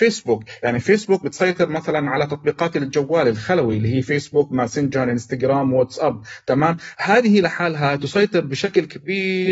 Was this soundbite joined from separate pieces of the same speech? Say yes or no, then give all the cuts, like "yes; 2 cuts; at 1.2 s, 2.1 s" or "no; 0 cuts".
no; 0 cuts